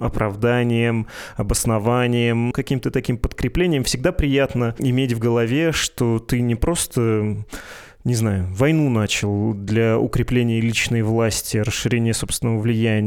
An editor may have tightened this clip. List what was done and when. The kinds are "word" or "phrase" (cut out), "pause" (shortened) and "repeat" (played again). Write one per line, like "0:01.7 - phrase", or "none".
0:02.5 - word